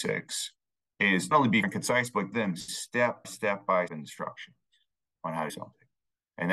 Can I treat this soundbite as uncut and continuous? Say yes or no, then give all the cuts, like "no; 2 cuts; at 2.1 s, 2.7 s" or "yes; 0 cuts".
no; 6 cuts; at 1.3 s, 1.6 s, 2.3 s, 3.2 s, 3.9 s, 5.5 s